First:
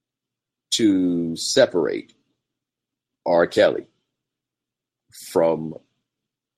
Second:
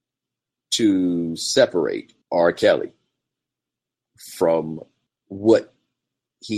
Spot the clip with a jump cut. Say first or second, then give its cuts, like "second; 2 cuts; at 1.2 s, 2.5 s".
second; 2 cuts; at 2.2 s, 5.1 s